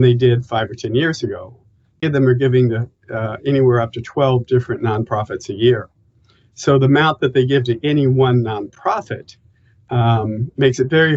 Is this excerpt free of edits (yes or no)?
no